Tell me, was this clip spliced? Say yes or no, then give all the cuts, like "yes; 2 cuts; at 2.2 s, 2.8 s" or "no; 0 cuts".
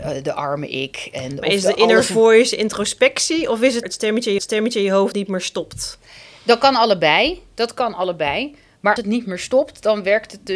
yes; 4 cuts; at 3.8 s, 4.4 s, 5.1 s, 9.0 s